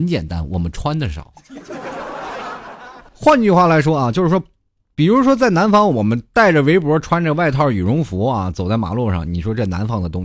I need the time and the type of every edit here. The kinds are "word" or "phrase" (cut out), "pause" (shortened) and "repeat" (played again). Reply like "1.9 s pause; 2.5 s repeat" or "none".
3.1 s pause